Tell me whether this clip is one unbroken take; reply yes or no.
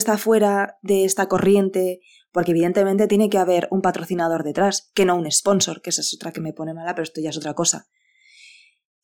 yes